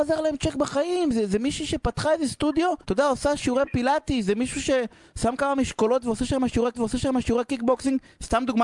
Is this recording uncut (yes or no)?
no